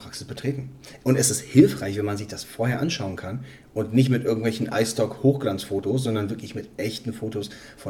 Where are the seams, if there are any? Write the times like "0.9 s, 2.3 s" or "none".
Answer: none